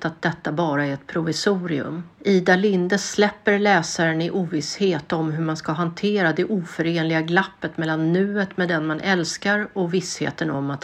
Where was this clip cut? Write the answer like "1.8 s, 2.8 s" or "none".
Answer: 2.1 s